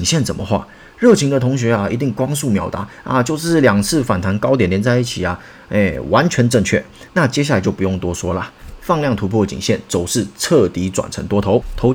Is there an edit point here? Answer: no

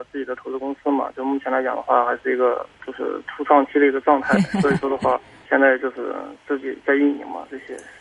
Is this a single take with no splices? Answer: no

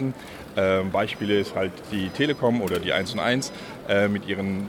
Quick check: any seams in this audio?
no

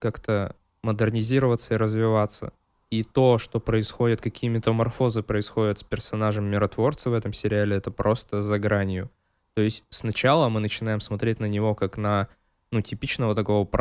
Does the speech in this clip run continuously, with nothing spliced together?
yes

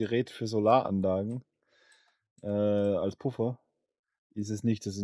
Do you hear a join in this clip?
no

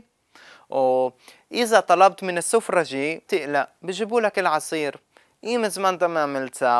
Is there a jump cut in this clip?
yes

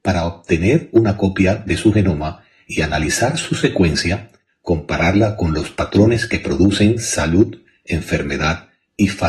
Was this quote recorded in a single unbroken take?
yes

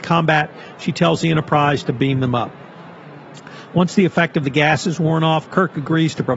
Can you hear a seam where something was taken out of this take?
no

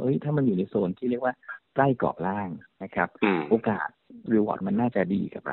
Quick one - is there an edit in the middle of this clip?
yes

